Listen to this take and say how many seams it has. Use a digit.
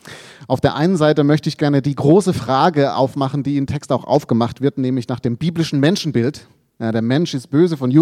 1